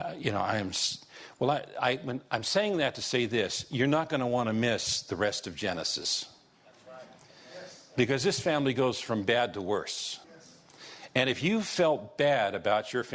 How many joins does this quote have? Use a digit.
1